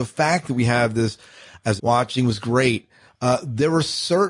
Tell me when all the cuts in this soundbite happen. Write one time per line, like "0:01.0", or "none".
0:01.8